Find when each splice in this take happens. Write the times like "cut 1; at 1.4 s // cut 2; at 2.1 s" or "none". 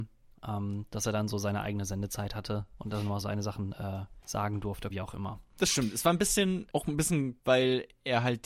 cut 1; at 3.2 s // cut 2; at 4.2 s // cut 3; at 4.9 s // cut 4; at 6.7 s // cut 5; at 7.4 s